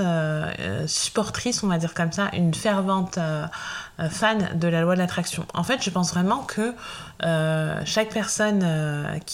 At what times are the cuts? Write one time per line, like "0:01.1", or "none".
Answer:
none